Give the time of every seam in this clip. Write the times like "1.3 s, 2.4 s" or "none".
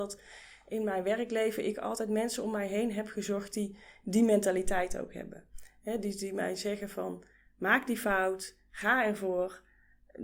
none